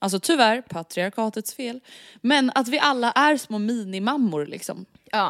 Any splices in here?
no; 0 cuts

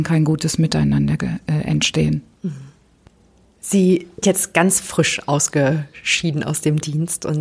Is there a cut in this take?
yes; 1 cut; at 4.2 s

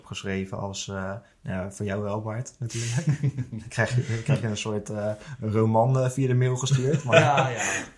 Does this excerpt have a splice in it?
no; 0 cuts

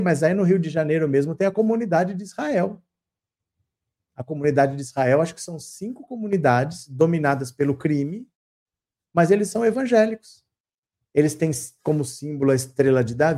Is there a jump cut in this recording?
no; 0 cuts

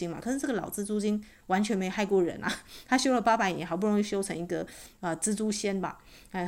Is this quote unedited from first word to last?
yes; 0 cuts

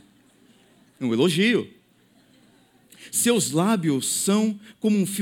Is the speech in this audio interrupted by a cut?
no; 0 cuts

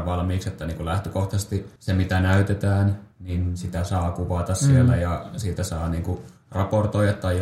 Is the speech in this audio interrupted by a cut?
yes; 2 cuts; at 1.8 s, 3.1 s

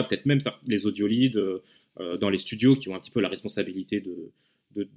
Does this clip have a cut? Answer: no; 0 cuts

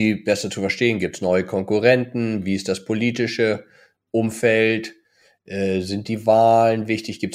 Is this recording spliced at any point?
no; 0 cuts

